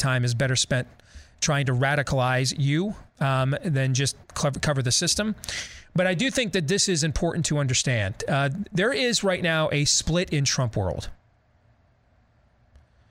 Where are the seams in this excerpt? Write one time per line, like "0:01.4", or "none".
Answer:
0:03.1
0:04.2